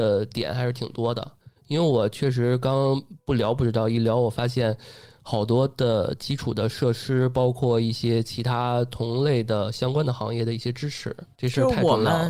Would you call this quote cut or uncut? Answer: cut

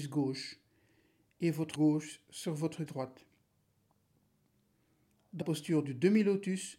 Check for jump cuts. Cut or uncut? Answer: cut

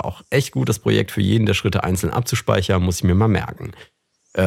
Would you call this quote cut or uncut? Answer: uncut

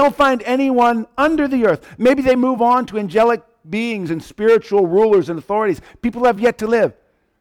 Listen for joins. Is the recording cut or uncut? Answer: uncut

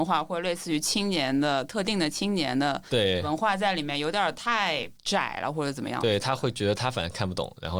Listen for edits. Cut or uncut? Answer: cut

